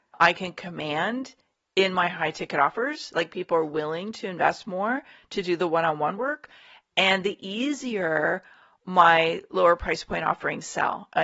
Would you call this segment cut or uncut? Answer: uncut